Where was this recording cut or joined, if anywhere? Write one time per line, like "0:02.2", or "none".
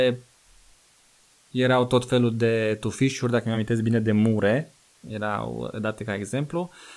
none